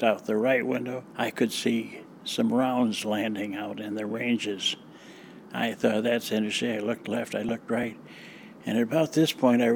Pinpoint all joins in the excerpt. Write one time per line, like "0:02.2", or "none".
0:01.1